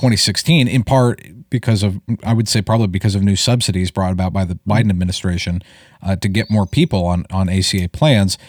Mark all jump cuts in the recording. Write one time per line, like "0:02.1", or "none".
none